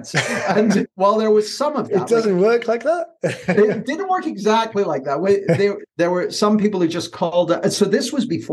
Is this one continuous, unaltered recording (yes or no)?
no